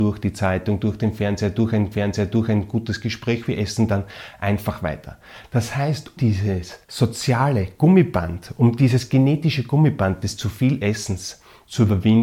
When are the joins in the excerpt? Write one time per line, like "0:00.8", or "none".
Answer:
0:01.9
0:06.2
0:06.8